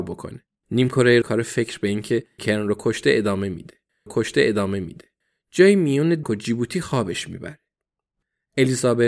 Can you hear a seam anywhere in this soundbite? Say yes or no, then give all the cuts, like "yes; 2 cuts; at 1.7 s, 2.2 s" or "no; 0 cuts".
yes; 4 cuts; at 1.2 s, 2.4 s, 4.1 s, 6.2 s